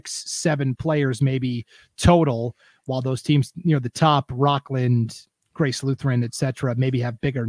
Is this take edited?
no; 0 cuts

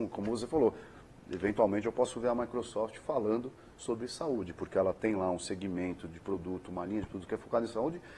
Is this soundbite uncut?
yes; 0 cuts

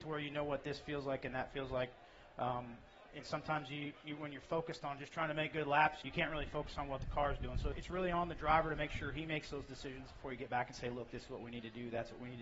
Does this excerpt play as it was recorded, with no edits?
no; 2 cuts; at 6.0 s, 7.7 s

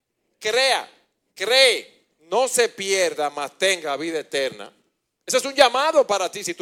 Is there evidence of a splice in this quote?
no; 0 cuts

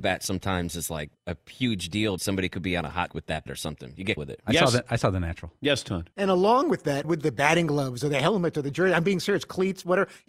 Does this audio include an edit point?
yes; 7 cuts; at 1.1 s, 2.2 s, 3.1 s, 3.5 s, 4.2 s, 6.1 s, 7.0 s

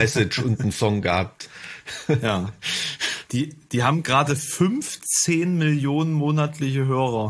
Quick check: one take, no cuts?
yes; 0 cuts

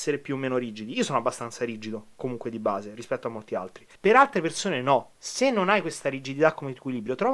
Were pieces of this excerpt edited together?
yes; 2 cuts; at 3.9 s, 5.1 s

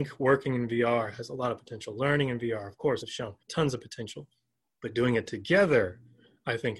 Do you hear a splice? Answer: yes; 3 cuts; at 3.0 s, 3.4 s, 4.6 s

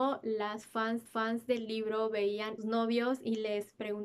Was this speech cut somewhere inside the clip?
yes; 2 cuts; at 1.1 s, 2.6 s

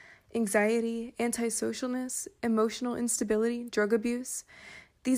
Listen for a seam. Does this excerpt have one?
no; 0 cuts

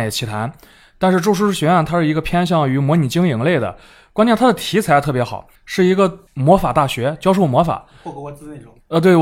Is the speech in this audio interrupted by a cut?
yes; 2 cuts; at 5.6 s, 6.3 s

